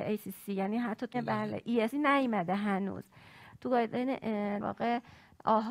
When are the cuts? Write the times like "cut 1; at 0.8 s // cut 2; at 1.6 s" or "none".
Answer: cut 1; at 1.1 s // cut 2; at 1.9 s // cut 3; at 4.6 s